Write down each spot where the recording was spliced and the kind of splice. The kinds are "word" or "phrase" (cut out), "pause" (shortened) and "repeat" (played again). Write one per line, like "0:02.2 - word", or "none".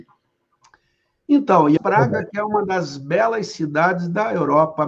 0:01.8 - word

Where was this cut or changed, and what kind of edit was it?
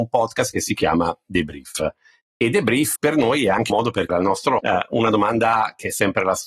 0:03.0 - word
0:03.7 - word
0:04.1 - word
0:04.6 - word

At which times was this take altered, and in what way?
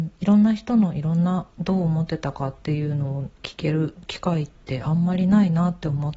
0:03.3 - pause

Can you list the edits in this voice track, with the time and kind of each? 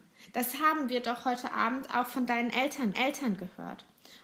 0:02.9 - repeat

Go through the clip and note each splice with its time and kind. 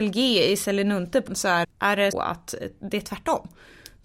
0:01.3 - word
0:01.6 - word
0:02.1 - word

